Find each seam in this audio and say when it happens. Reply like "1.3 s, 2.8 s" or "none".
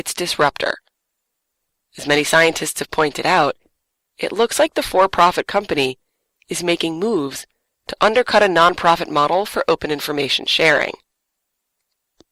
none